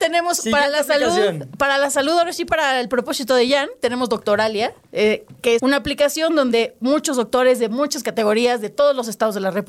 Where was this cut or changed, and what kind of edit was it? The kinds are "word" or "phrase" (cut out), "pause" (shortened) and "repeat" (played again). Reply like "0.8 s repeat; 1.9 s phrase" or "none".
5.6 s word